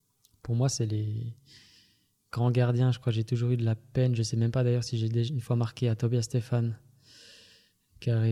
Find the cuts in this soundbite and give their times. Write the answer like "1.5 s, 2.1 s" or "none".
none